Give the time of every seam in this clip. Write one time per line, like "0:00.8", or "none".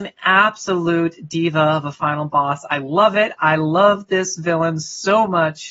none